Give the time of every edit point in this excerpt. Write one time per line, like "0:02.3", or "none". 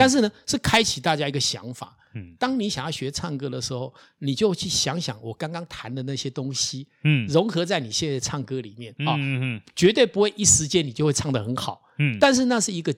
0:09.0

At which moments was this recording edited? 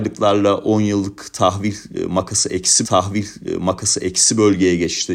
0:02.8

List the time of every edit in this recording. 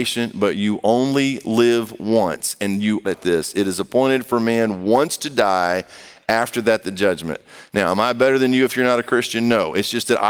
0:03.0

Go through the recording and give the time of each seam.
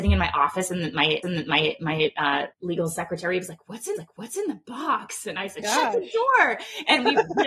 0:01.2
0:02.5
0:04.0

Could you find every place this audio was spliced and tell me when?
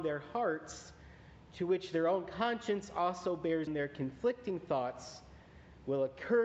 0:03.7

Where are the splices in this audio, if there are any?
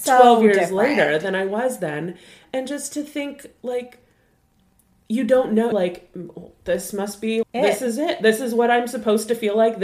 0:05.7
0:07.4

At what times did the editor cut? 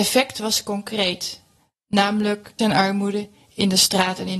0:02.6

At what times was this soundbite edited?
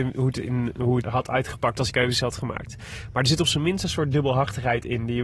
0:01.0
0:01.9

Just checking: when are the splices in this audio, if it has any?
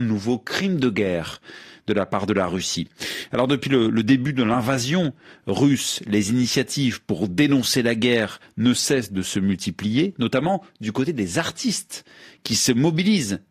none

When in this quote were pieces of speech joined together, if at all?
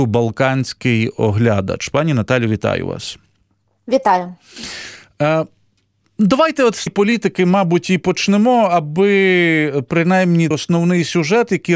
0:06.9
0:10.5

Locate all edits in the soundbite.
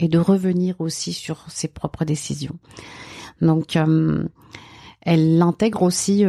none

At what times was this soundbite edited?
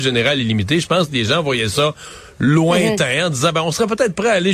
none

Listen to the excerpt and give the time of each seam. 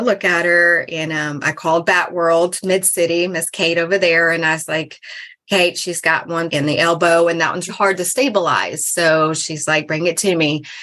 0:06.5
0:07.7

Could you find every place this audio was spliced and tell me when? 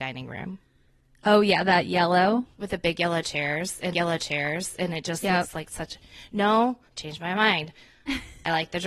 0:02.5
0:03.9
0:06.9

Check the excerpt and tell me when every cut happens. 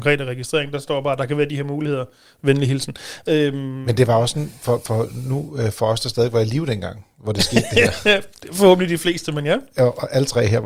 none

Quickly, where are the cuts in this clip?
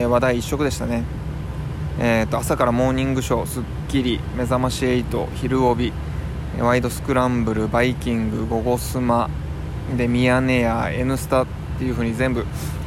none

